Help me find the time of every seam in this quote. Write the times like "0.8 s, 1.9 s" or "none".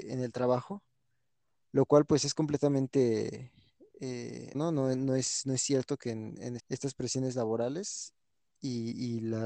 4.5 s, 6.6 s